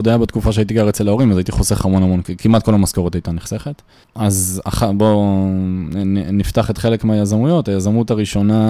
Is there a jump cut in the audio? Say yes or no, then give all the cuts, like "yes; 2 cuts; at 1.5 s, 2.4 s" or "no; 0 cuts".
no; 0 cuts